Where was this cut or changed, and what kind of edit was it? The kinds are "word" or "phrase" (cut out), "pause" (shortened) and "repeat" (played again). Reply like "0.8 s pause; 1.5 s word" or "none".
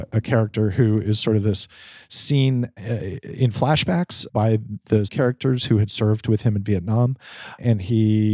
4.3 s word; 5.1 s phrase